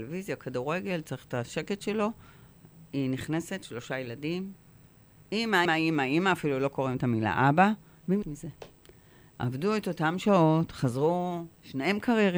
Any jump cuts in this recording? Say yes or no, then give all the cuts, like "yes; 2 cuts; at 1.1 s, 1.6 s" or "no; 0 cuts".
yes; 2 cuts; at 5.7 s, 8.2 s